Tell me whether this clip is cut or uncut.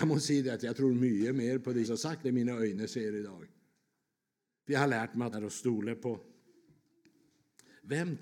cut